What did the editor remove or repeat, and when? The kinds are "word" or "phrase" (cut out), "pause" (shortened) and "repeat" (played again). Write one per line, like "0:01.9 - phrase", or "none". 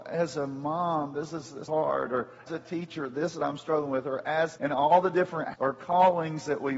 0:01.7 - word
0:02.5 - word
0:03.4 - word
0:04.6 - word
0:05.5 - word